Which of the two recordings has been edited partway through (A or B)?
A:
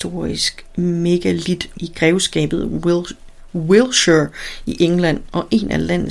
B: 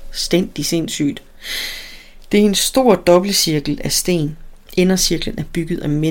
A